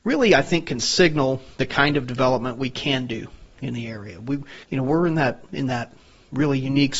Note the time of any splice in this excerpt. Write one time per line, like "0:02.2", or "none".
0:04.6

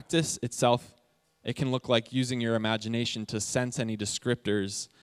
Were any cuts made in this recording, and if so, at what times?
none

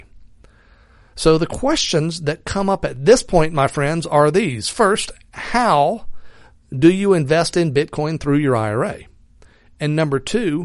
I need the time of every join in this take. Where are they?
none

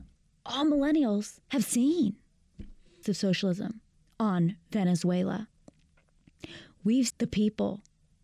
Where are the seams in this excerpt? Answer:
0:01.4
0:03.0
0:07.1

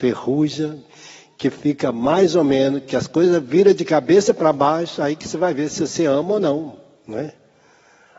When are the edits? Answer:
none

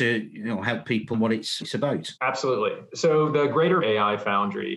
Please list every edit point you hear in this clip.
0:01.1
0:01.6
0:02.2
0:03.8

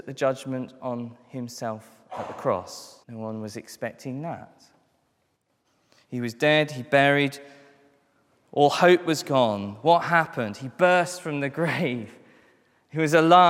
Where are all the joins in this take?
0:03.0

